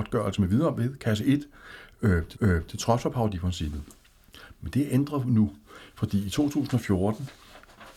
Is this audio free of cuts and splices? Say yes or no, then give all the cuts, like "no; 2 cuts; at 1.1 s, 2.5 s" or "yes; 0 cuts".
no; 1 cut; at 2.3 s